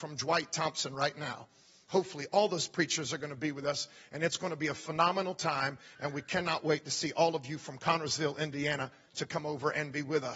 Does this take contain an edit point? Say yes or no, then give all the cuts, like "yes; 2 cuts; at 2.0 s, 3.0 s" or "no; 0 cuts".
no; 0 cuts